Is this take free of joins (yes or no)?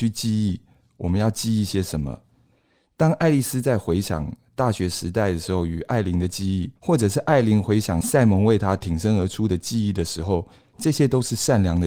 no